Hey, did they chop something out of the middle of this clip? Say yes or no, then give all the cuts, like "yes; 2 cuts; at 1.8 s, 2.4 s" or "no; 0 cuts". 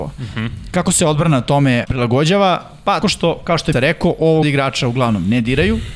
yes; 4 cuts; at 1.8 s, 3.0 s, 3.7 s, 4.4 s